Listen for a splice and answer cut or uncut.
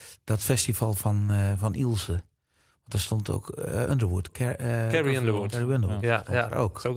uncut